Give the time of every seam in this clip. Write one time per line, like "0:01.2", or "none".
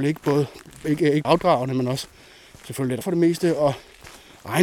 0:01.2
0:03.0